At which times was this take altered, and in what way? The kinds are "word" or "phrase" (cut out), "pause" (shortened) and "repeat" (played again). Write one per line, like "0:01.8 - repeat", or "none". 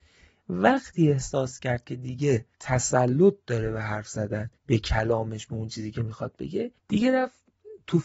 0:02.5 - pause
0:04.6 - pause
0:06.8 - pause